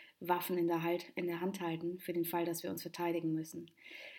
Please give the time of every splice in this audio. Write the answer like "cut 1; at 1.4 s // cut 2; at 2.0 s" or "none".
none

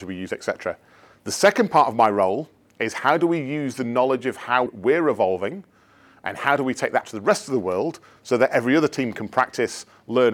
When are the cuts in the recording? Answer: cut 1; at 4.7 s // cut 2; at 7.0 s

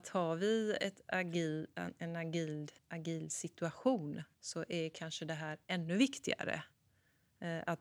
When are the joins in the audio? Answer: cut 1; at 2.8 s // cut 2; at 4.3 s

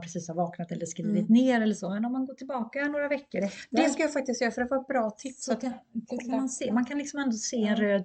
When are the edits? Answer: none

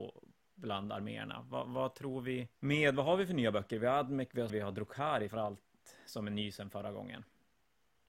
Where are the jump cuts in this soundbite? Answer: cut 1; at 2.5 s // cut 2; at 4.5 s // cut 3; at 5.3 s

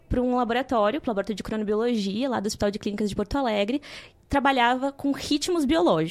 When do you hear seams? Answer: none

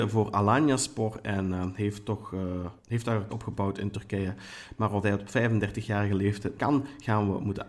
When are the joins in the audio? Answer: cut 1; at 2.8 s // cut 2; at 3.3 s // cut 3; at 5.0 s // cut 4; at 6.6 s

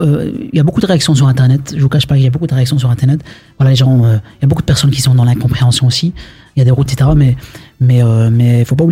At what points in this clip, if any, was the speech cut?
cut 1; at 6.9 s

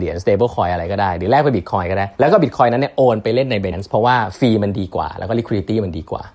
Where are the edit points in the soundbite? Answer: cut 1; at 2.1 s // cut 2; at 3.7 s

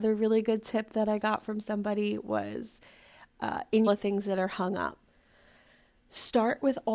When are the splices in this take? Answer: cut 1; at 3.9 s

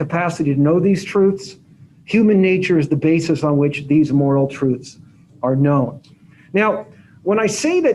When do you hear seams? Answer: none

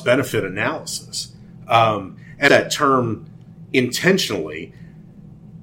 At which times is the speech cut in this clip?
cut 1; at 2.5 s

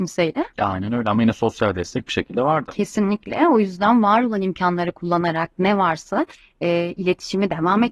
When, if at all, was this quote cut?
none

